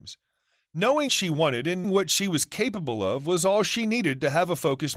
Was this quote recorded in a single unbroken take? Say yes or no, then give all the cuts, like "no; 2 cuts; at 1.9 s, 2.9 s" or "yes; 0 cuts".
no; 2 cuts; at 1.1 s, 1.8 s